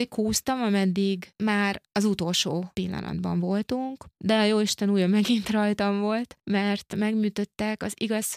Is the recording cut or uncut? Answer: uncut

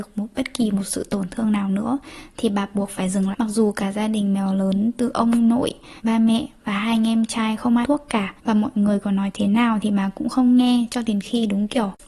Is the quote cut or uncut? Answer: cut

